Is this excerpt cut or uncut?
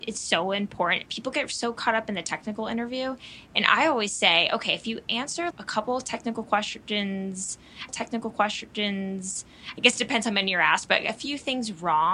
cut